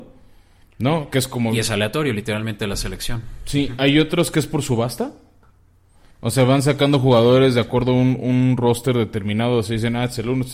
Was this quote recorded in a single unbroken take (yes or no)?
yes